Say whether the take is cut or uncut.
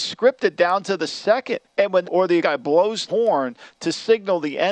cut